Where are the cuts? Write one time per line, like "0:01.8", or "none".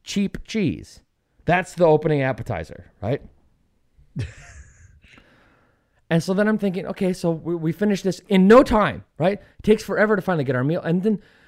none